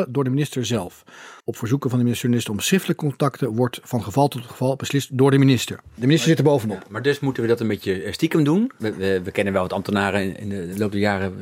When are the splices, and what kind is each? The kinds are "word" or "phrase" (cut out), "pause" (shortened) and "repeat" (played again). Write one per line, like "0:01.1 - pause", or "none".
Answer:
0:01.4 - pause

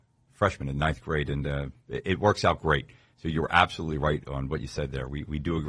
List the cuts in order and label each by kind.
none

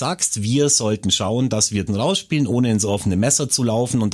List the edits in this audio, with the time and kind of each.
0:01.9 - phrase

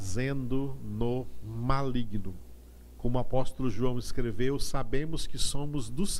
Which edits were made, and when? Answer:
none

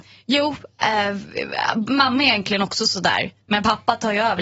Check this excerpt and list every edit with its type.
none

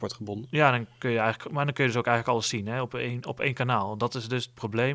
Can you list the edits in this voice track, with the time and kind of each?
none

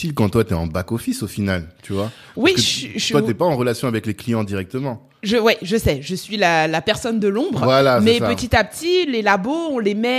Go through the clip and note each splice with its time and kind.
none

